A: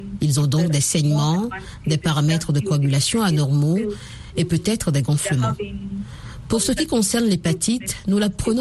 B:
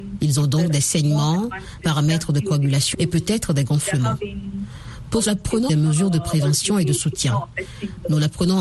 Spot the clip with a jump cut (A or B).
B